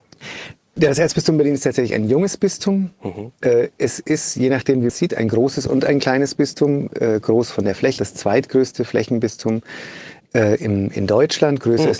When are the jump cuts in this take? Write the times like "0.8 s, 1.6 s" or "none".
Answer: 4.9 s, 8.0 s